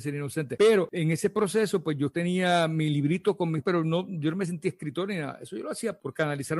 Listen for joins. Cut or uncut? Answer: cut